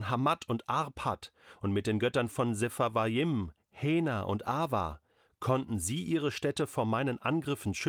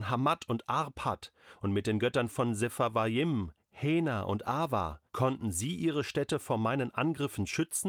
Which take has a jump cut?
second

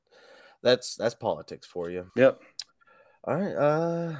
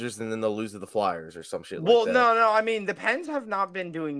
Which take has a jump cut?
first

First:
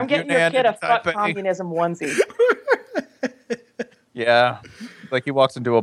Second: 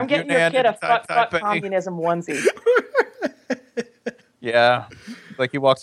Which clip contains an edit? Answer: second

